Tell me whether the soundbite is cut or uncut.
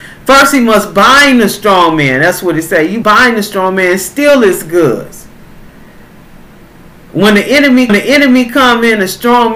cut